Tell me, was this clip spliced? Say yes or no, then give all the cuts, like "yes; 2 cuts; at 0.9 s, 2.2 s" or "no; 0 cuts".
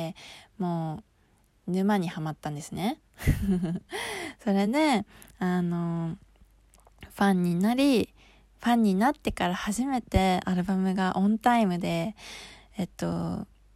no; 0 cuts